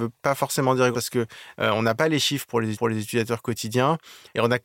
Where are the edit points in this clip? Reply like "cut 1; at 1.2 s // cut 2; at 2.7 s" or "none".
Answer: cut 1; at 0.9 s // cut 2; at 2.7 s